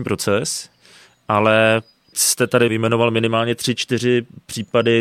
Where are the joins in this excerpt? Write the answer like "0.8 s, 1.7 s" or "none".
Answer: 2.1 s